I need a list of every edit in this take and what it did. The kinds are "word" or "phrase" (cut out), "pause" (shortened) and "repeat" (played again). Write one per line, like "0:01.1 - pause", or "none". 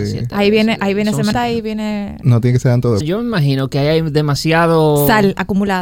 0:01.3 - phrase
0:03.0 - phrase